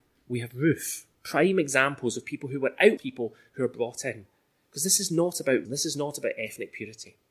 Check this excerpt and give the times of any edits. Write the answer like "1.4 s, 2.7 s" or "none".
1.1 s, 3.0 s, 5.7 s